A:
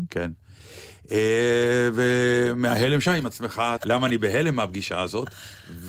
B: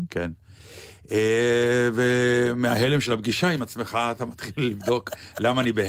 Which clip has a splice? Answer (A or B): A